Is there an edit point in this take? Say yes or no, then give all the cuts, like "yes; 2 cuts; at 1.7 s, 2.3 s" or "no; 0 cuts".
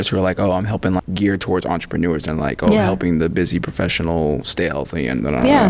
no; 0 cuts